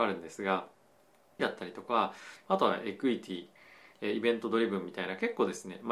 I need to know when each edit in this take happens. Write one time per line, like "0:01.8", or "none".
0:01.4

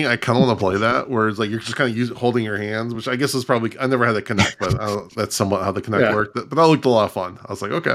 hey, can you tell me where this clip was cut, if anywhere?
none

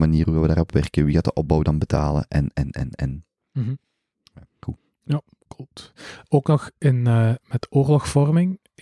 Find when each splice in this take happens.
none

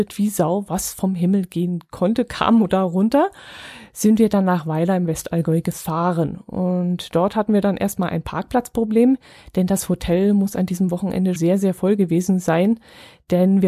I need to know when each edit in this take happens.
0:11.4

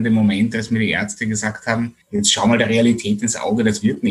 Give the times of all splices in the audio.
0:02.0

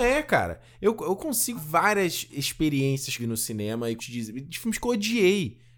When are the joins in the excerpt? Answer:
0:01.6
0:03.2
0:04.0

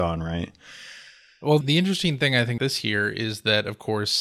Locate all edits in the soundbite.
0:01.6
0:02.6

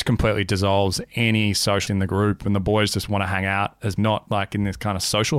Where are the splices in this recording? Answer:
0:01.9
0:04.0

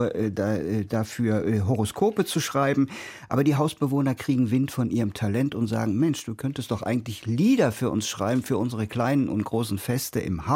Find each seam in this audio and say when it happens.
none

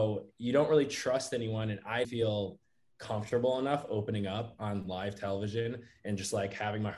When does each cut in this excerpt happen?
0:02.0

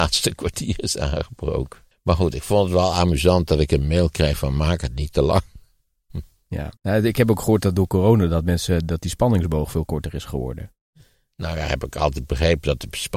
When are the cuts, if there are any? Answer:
0:01.9
0:06.8

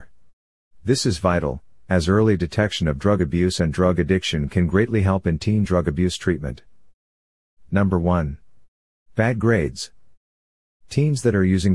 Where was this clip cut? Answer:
none

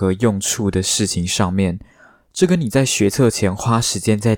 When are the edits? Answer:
none

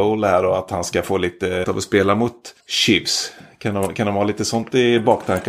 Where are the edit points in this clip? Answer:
0:01.6
0:02.6

